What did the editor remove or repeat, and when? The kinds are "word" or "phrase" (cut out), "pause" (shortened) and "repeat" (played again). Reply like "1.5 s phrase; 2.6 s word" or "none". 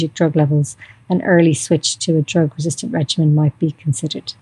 none